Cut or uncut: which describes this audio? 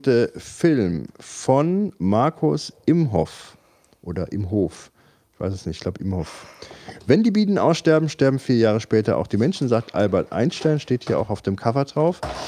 uncut